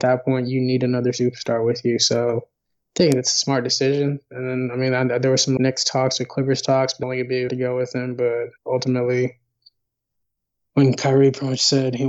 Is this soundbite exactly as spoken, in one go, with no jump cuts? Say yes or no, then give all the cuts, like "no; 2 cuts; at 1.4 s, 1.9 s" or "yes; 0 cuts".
no; 4 cuts; at 5.6 s, 7.0 s, 7.5 s, 8.6 s